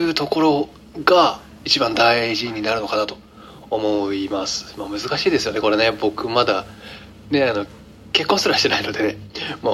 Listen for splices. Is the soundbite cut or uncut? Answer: uncut